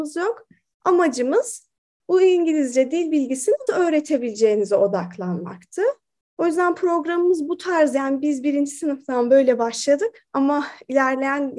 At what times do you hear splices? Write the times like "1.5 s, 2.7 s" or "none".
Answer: 3.7 s